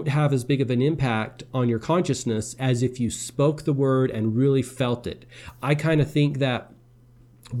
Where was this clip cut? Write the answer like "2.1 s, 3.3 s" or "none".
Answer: none